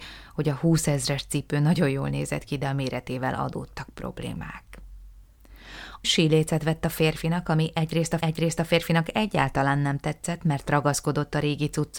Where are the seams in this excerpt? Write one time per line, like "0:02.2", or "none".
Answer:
0:06.0
0:08.2